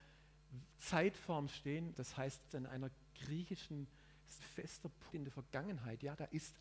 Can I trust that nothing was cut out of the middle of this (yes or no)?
no